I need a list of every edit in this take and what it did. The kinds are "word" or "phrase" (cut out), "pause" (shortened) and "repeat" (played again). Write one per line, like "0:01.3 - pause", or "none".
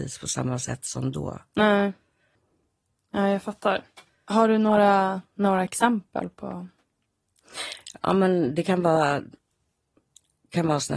0:05.3 - pause